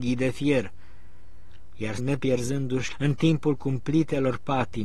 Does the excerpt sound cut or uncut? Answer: cut